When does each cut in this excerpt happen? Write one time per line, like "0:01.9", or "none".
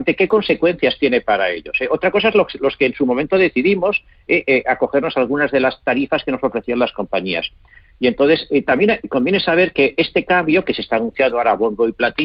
none